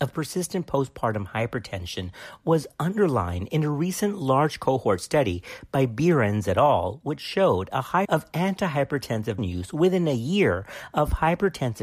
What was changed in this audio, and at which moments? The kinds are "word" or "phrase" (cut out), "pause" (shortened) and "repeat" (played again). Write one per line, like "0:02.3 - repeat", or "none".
0:08.0 - word
0:09.4 - word